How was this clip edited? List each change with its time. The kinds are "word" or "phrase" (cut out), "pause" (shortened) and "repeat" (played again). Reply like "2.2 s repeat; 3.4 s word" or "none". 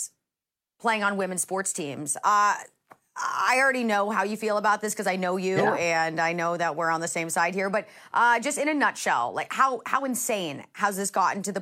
none